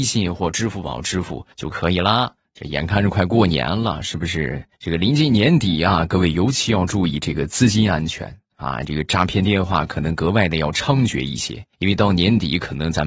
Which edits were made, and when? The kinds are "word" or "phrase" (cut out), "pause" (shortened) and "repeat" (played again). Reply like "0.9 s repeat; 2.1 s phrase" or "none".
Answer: 1.5 s pause; 4.7 s pause; 11.7 s pause